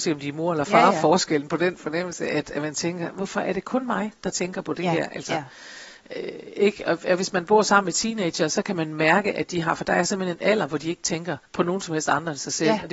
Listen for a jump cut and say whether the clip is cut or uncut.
cut